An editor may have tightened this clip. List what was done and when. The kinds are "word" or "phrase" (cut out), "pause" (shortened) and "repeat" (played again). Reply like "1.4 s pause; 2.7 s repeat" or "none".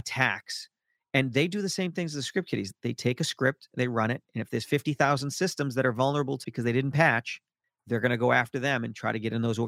6.4 s word